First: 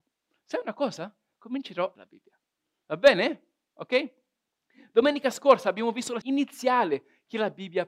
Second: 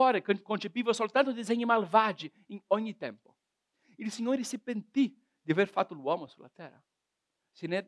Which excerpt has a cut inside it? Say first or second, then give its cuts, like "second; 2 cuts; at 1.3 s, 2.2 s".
first; 2 cuts; at 2.0 s, 6.2 s